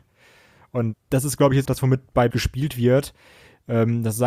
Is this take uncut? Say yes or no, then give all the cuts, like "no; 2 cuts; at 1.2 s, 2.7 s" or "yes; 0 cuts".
no; 3 cuts; at 0.9 s, 1.7 s, 2.3 s